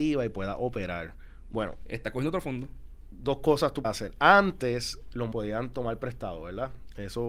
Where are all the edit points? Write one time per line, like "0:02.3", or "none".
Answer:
0:03.8
0:05.3